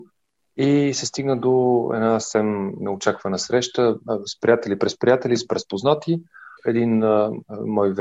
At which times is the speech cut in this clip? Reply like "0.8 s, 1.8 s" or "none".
5.5 s, 6.6 s